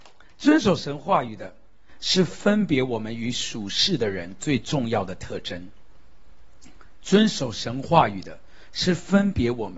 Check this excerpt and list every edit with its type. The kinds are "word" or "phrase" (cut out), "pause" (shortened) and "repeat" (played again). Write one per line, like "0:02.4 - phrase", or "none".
none